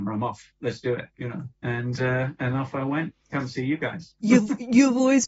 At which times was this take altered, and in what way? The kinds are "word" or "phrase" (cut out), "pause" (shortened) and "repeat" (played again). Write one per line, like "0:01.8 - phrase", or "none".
0:01.1 - pause
0:01.6 - pause
0:03.2 - pause
0:04.2 - pause